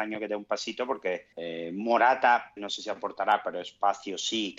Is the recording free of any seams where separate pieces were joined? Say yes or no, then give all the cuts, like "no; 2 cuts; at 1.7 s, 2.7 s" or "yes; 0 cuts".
no; 2 cuts; at 1.3 s, 2.6 s